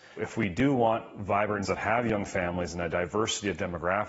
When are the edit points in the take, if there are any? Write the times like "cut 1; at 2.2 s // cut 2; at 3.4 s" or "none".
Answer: cut 1; at 1.6 s